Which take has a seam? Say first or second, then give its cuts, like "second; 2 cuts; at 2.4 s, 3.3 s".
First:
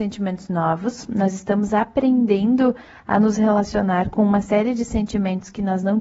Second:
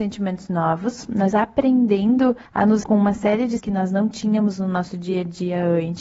second; 4 cuts; at 1.3 s, 2.5 s, 2.8 s, 3.6 s